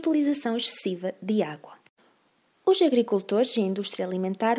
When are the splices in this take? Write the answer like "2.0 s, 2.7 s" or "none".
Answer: none